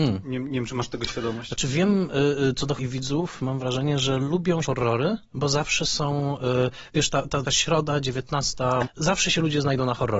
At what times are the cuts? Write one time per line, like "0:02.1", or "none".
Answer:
0:02.8
0:04.2
0:04.6
0:07.4
0:08.8